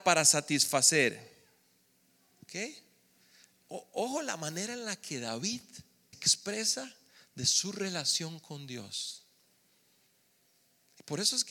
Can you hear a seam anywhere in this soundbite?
yes; 1 cut; at 6.1 s

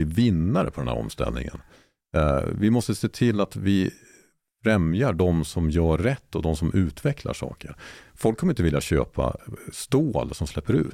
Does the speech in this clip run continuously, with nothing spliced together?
yes; 0 cuts

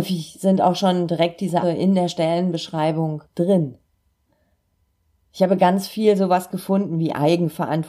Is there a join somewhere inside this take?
yes; 1 cut; at 1.6 s

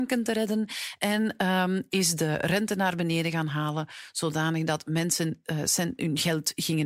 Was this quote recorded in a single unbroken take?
yes; 0 cuts

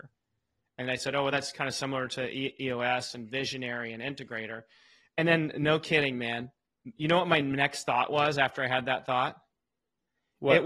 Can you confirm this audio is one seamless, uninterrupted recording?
yes; 0 cuts

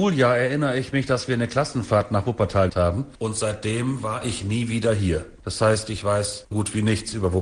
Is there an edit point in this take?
yes; 2 cuts; at 2.7 s, 6.5 s

